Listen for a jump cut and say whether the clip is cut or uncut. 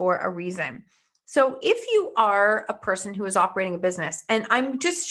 uncut